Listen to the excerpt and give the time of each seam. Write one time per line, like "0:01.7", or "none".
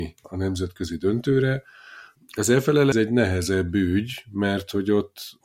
0:02.9